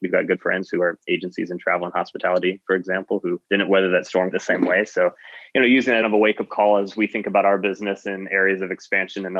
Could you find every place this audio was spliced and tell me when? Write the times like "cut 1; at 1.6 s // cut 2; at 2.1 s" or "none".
cut 1; at 3.4 s // cut 2; at 4.3 s // cut 3; at 6.0 s